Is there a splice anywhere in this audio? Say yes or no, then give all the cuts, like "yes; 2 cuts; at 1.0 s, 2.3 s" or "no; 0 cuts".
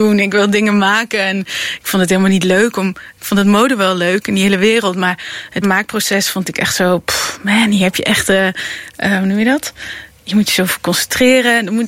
yes; 1 cut; at 5.6 s